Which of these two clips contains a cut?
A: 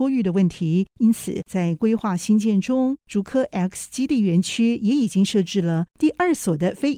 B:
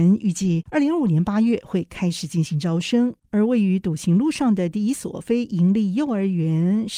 B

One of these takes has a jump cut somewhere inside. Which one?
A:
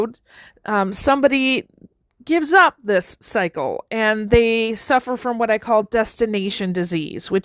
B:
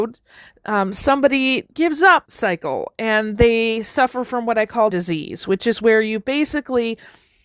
B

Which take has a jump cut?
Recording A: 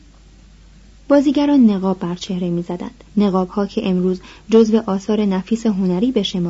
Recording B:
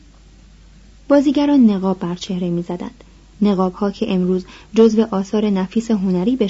A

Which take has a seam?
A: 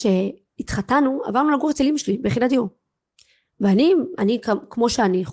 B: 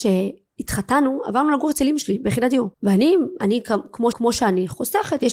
B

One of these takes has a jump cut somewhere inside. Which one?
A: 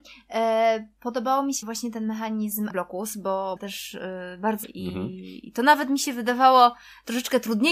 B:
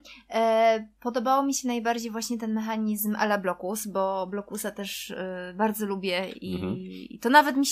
A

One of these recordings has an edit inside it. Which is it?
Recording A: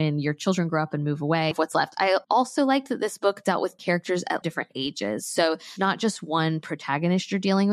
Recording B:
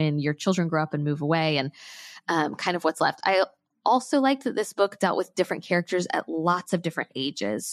A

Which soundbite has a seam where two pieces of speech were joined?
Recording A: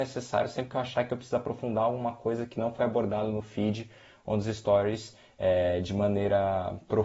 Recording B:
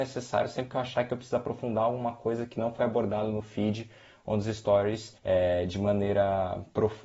B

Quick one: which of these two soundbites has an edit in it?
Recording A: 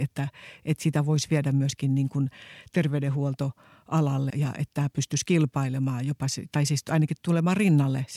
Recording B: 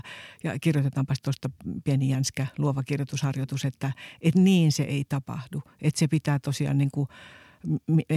A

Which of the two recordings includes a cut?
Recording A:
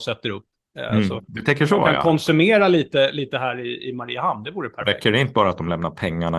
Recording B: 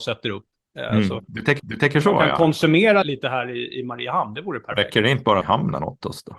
B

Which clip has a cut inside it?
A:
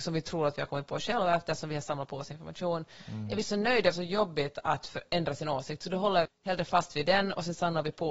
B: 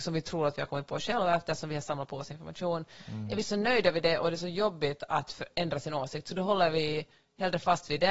A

